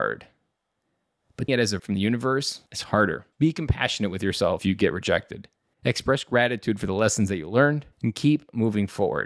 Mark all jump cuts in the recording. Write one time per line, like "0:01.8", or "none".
0:01.5
0:01.8
0:02.7
0:03.3
0:04.6
0:05.6
0:07.9